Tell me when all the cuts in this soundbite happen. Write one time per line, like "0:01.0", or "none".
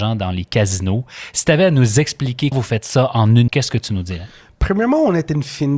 0:02.5
0:03.5